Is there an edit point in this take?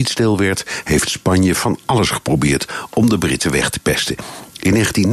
no; 0 cuts

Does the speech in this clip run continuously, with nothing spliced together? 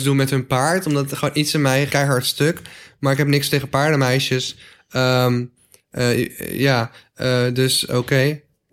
no; 1 cut; at 1.9 s

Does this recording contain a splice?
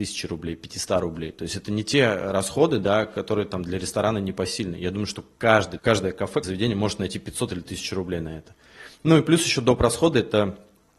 yes; 2 cuts; at 5.8 s, 6.4 s

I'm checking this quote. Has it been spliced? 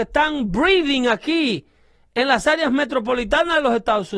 no; 0 cuts

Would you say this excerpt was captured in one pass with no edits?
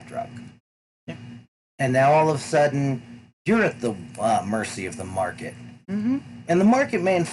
yes; 0 cuts

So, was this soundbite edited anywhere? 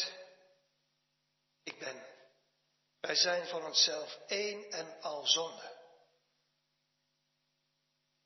no; 0 cuts

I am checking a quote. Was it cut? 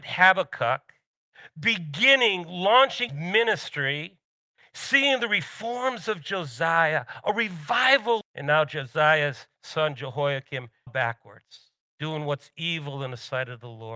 yes; 4 cuts; at 3.1 s, 8.2 s, 10.9 s, 11.8 s

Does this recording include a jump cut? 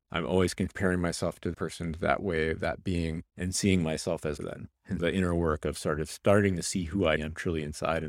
yes; 5 cuts; at 1.5 s, 3.3 s, 4.4 s, 5.0 s, 7.2 s

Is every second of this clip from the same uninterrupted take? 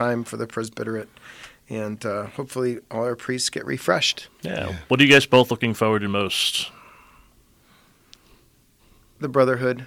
yes; 0 cuts

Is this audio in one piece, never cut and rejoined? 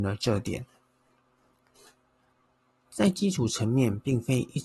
yes; 0 cuts

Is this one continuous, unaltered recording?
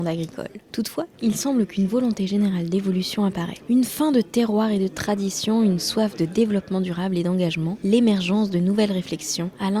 yes; 0 cuts

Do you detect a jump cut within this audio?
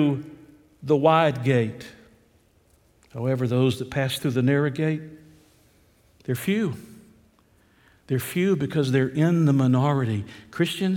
no; 0 cuts

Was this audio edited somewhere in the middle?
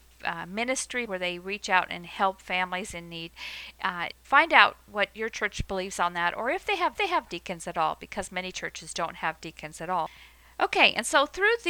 yes; 3 cuts; at 1.1 s, 4.1 s, 6.9 s

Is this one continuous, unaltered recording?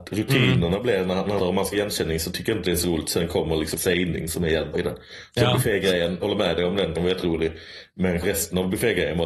no; 7 cuts; at 1.4 s, 1.7 s, 3.8 s, 4.7 s, 6.2 s, 7.0 s, 8.2 s

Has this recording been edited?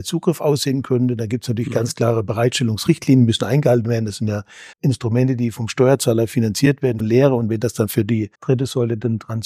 yes; 3 cuts; at 4.7 s, 7.0 s, 8.3 s

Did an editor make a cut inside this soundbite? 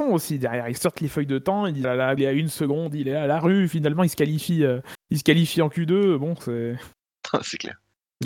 yes; 3 cuts; at 1.8 s, 2.2 s, 5.0 s

